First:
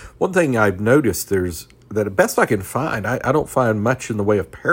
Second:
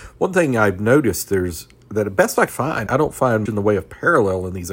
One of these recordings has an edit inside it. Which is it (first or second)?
second